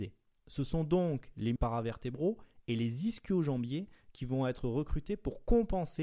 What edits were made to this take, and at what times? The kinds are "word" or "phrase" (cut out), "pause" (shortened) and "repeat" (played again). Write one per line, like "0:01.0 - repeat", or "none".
0:01.6 - word